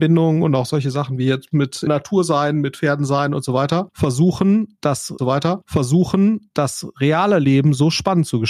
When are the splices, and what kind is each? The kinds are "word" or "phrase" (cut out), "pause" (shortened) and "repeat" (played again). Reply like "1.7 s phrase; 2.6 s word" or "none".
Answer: 1.9 s word; 5.2 s repeat